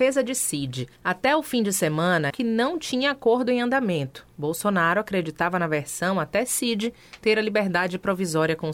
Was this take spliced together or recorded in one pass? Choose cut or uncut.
cut